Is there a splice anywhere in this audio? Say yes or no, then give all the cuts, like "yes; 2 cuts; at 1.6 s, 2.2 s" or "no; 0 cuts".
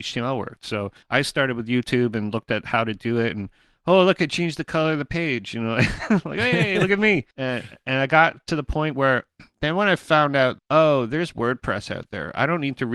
yes; 3 cuts; at 1.0 s, 7.3 s, 10.6 s